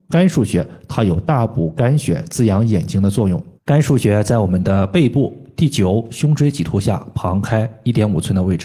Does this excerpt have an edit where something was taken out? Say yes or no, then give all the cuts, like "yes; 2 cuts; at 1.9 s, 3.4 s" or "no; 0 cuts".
yes; 1 cut; at 3.6 s